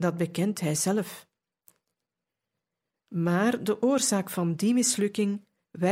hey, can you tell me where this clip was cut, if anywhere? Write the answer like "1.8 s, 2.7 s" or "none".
none